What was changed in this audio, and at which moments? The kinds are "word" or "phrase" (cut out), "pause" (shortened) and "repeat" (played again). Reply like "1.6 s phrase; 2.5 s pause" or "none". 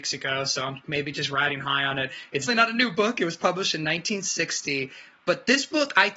2.5 s word